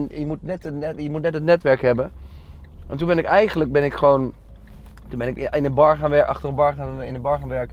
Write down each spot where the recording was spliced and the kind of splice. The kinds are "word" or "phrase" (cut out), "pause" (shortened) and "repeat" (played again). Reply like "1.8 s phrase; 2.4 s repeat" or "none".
none